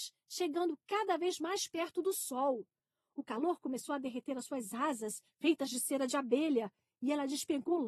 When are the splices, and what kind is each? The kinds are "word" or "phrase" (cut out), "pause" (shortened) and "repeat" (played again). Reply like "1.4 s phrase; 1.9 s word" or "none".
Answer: none